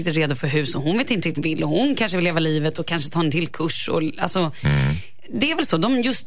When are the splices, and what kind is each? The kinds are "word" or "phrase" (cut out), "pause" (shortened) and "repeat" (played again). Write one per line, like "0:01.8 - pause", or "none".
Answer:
0:01.4 - word